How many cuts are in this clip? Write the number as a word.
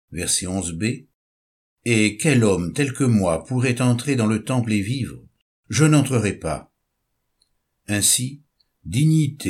zero